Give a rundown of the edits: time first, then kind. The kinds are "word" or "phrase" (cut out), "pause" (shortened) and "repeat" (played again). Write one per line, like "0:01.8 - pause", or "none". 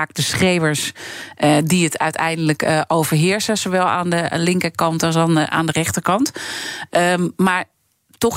none